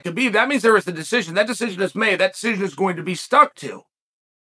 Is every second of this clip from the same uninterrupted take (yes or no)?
yes